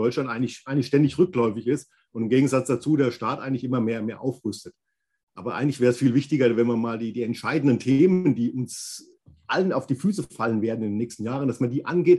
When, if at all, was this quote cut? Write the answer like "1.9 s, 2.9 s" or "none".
none